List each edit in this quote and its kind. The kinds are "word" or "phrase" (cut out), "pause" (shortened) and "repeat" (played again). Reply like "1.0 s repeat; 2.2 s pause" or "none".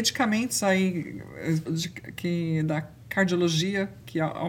1.7 s word